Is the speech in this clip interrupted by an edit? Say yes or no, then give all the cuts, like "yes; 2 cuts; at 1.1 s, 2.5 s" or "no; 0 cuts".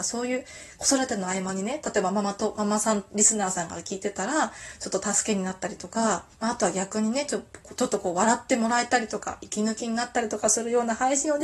yes; 1 cut; at 6.3 s